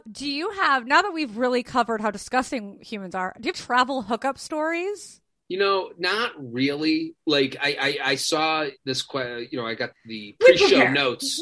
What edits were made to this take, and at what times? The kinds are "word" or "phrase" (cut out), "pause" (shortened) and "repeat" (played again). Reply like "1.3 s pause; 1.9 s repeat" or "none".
3.5 s phrase; 8.8 s pause; 9.9 s word